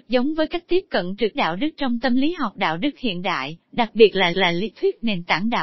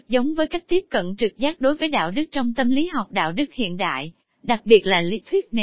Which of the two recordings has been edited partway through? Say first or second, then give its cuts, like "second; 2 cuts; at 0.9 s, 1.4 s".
first; 3 cuts; at 1.3 s, 3.6 s, 4.3 s